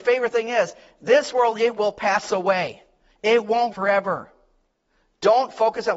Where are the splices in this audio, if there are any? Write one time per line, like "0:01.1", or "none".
0:03.7